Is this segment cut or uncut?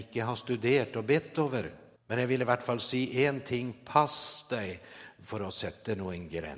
cut